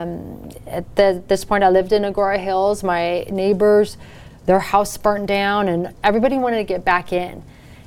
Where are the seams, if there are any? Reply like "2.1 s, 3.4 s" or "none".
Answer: none